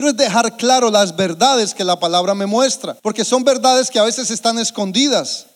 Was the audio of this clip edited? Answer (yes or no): yes